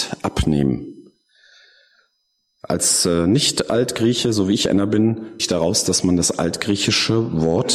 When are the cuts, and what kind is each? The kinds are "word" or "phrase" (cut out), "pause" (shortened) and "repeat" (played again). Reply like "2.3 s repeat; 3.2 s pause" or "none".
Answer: 5.4 s word